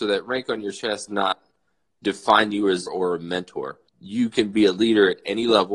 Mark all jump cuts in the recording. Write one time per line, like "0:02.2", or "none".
0:01.1
0:02.9
0:03.9